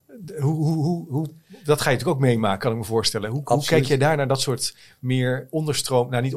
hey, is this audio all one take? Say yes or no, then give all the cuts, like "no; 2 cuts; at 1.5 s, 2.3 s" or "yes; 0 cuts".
yes; 0 cuts